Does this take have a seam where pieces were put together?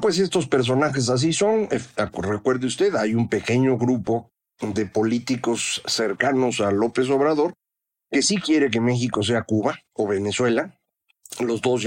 no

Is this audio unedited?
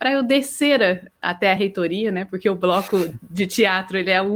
yes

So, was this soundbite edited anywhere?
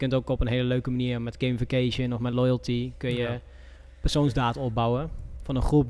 no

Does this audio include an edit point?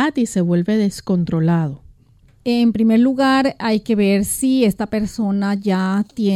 no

